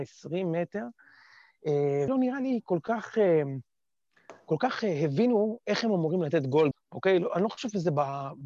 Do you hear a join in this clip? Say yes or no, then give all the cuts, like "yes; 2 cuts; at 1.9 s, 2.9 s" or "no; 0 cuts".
yes; 3 cuts; at 2.1 s, 6.7 s, 7.3 s